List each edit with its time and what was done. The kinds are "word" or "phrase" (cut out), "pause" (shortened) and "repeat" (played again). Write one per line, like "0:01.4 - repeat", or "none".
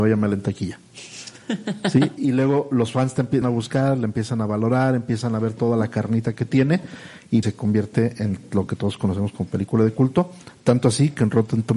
0:03.4 - phrase
0:07.4 - word

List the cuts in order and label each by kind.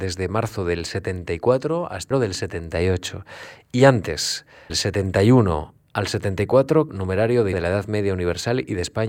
0:02.1 - word
0:04.7 - word
0:06.9 - word
0:07.5 - word

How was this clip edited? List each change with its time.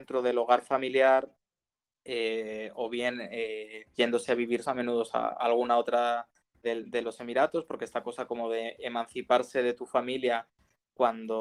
0:03.9 - word
0:04.6 - word
0:06.6 - word

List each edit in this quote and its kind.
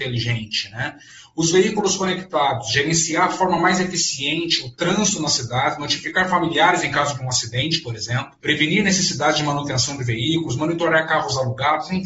none

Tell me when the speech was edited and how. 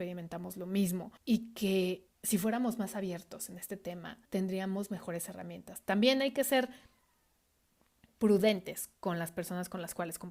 0:01.2 - pause
0:02.1 - pause
0:04.2 - pause

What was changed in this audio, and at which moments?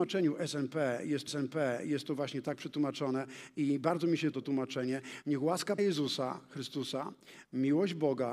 0:01.3 - repeat
0:04.3 - word
0:05.8 - word

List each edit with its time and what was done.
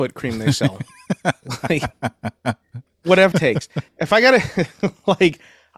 0:03.3 - word

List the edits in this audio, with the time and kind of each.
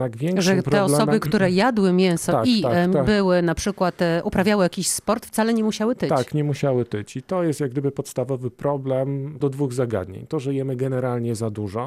0:09.4 - phrase

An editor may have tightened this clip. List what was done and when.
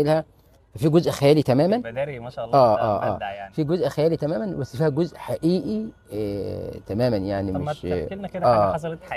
none

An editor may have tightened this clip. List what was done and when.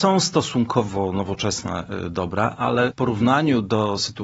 0:02.9 - word

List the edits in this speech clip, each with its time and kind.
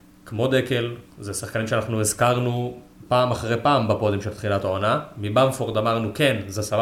none

